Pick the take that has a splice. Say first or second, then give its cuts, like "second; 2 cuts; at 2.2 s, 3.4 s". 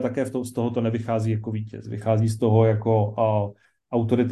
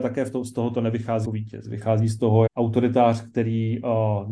second; 2 cuts; at 1.2 s, 2.5 s